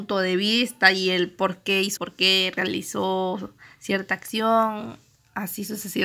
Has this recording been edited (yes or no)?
yes